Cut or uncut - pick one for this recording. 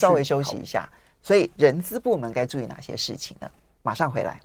uncut